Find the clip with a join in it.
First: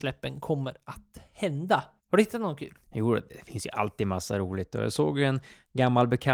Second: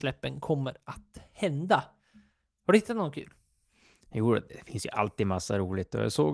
first; 2 cuts; at 2.0 s, 2.8 s

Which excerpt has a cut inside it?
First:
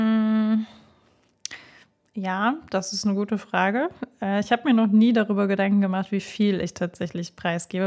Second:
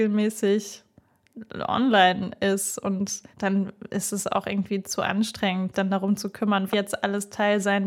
second; 3 cuts; at 3.3 s, 5.7 s, 6.7 s

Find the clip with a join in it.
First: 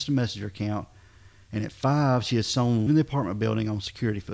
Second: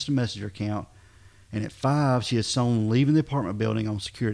first; 1 cut; at 2.9 s

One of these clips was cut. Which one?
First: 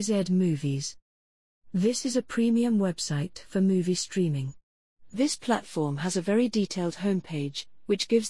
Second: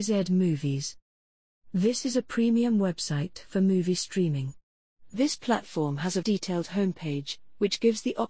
second; 1 cut; at 6.2 s

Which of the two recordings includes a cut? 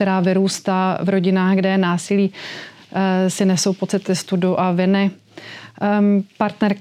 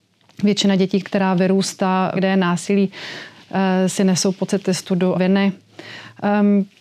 second; 3 cuts; at 1.0 s, 2.2 s, 5.1 s

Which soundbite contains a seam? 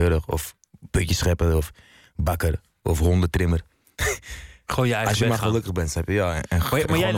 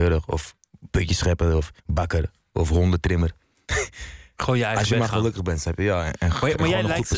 second; 1 cut; at 1.8 s

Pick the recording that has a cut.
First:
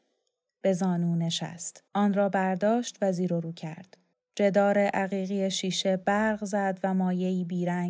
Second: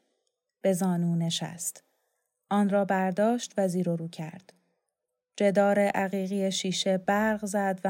first; 2 cuts; at 1.9 s, 4.1 s

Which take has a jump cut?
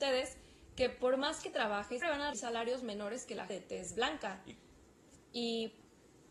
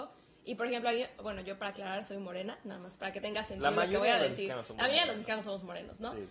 first; 3 cuts; at 2.0 s, 2.3 s, 3.5 s

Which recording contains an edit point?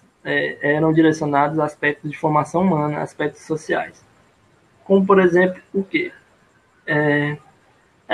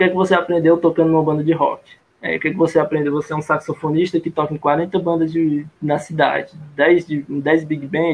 second; 2 cuts; at 2.0 s, 5.8 s

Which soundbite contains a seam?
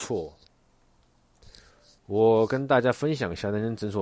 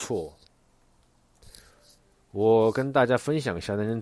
first; 1 cut; at 2.0 s

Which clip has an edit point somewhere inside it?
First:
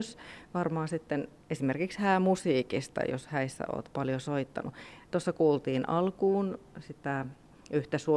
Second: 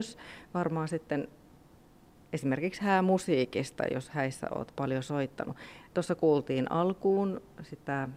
first; 1 cut; at 1.4 s

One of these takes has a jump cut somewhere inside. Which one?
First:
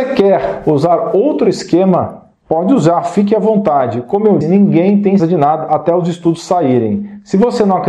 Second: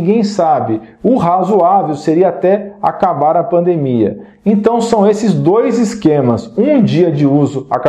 first; 2 cuts; at 4.4 s, 5.2 s

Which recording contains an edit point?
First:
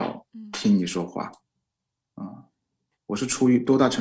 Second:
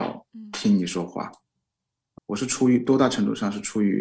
second; 1 cut; at 2.2 s

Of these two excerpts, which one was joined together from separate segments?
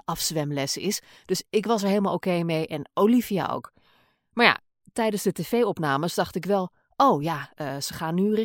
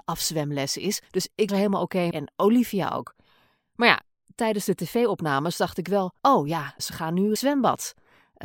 second; 6 cuts; at 1.1 s, 1.5 s, 2.1 s, 6.2 s, 6.8 s, 7.4 s

